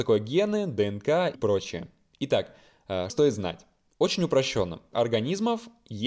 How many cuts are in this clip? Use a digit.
3